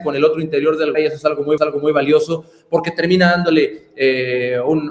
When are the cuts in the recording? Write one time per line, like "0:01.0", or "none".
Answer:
0:00.9
0:01.6